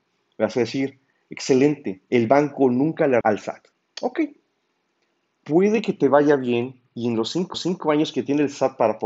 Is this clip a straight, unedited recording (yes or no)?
no